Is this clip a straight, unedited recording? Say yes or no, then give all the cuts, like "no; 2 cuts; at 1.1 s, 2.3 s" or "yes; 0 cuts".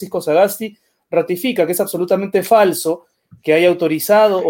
yes; 0 cuts